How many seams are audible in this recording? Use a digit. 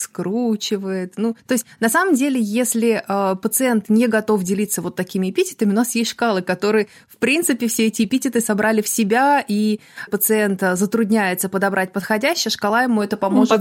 2